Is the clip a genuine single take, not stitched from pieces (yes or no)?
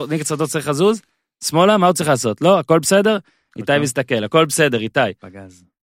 yes